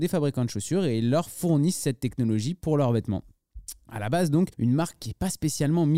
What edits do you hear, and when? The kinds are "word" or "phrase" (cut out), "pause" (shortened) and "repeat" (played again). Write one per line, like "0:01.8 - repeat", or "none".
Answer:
0:04.5 - pause